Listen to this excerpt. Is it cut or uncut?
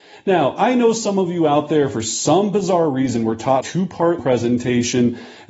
cut